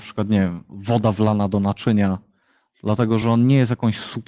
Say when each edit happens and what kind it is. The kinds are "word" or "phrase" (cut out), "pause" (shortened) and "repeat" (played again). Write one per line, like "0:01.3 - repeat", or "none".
none

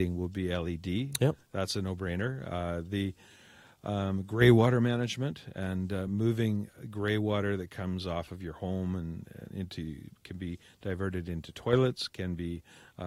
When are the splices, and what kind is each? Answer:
none

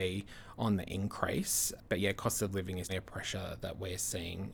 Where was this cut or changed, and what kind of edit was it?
0:02.9 - word

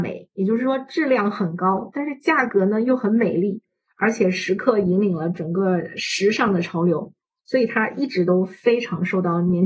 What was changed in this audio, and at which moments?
none

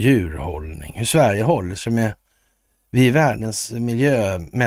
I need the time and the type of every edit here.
none

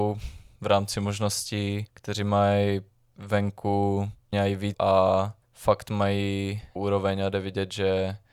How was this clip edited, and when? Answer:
0:01.9 - pause
0:04.3 - word
0:04.7 - word
0:05.4 - pause
0:06.8 - word

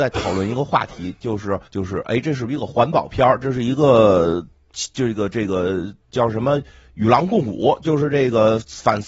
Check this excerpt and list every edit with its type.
0:01.7 - pause
0:06.0 - pause

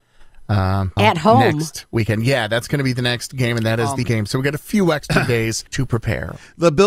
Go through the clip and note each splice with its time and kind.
0:01.0 - word
0:04.0 - word
0:05.7 - pause

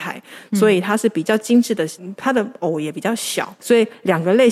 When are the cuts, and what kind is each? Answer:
0:02.0 - word
0:03.6 - word

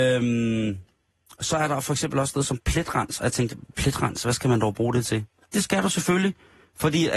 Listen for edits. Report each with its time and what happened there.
none

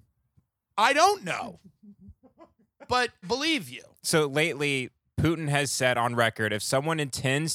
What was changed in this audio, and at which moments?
0:03.2 - word

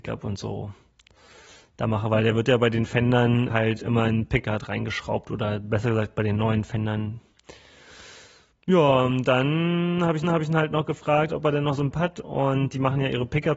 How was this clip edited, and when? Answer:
0:03.5 - word
0:10.2 - repeat
0:11.9 - word

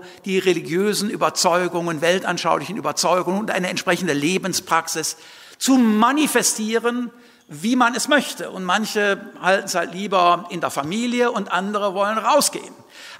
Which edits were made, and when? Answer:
none

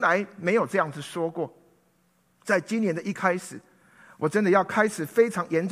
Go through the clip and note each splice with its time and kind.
0:02.1 - pause

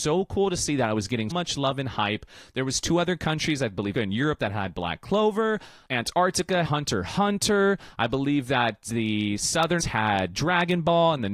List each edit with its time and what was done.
0:01.3 - word
0:03.9 - phrase
0:06.6 - word
0:09.8 - word

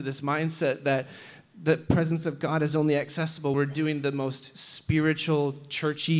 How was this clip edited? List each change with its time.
0:03.5 - word

